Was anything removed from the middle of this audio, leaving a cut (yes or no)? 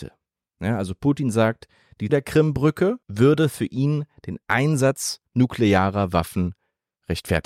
yes